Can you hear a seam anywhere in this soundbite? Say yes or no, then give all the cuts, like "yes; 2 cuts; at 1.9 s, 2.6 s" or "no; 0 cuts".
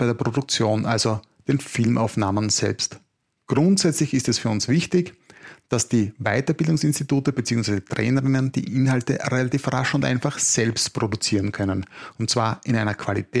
no; 0 cuts